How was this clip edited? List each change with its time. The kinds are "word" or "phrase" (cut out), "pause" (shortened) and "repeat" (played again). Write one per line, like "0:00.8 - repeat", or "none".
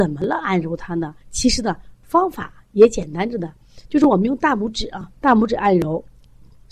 0:01.2 - pause
0:05.2 - pause